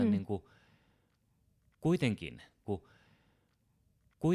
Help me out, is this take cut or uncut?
cut